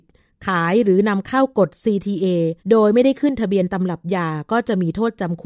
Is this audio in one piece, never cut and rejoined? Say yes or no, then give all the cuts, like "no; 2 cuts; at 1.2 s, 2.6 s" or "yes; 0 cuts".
no; 1 cut; at 2.6 s